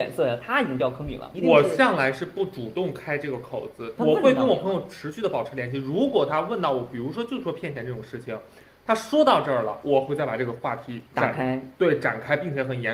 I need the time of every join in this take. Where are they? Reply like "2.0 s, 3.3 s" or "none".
4.0 s, 11.1 s